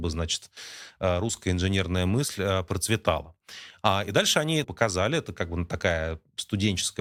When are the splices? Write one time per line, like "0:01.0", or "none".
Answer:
0:04.6